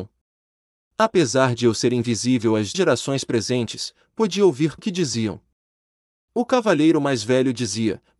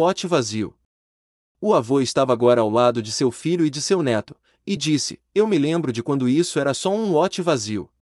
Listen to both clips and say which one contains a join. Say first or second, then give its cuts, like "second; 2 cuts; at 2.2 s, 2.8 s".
first; 2 cuts; at 2.7 s, 4.8 s